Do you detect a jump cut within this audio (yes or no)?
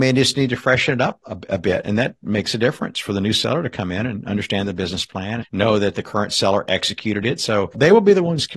yes